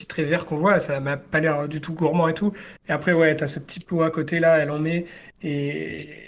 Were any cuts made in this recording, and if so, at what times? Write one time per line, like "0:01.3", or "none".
none